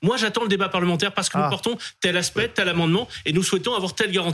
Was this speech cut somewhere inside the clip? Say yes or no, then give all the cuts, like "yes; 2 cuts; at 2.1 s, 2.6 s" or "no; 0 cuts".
no; 0 cuts